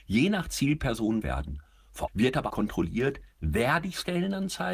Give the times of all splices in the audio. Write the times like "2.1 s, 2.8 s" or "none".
1.2 s, 2.1 s, 2.5 s